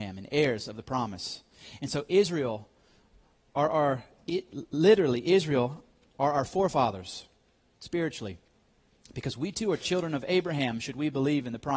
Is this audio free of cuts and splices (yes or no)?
yes